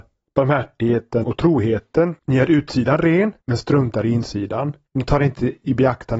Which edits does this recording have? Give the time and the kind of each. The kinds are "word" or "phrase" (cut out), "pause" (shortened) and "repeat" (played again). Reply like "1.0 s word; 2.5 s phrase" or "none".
1.2 s word; 2.2 s pause; 3.4 s pause; 4.9 s pause